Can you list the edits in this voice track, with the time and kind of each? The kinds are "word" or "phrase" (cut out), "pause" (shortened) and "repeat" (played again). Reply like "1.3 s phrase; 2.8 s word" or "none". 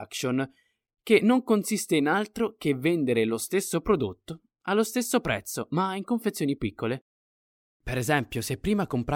6.6 s word